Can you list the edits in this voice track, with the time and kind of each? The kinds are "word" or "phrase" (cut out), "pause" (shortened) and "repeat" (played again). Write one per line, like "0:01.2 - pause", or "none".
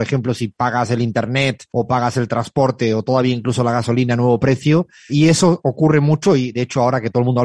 0:01.7 - pause
0:05.1 - word